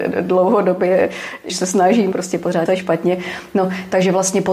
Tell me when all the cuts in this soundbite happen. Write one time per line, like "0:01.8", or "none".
0:01.5
0:02.1
0:02.7